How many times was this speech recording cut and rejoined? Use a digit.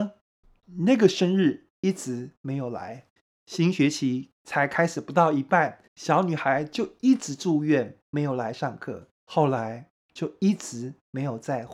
4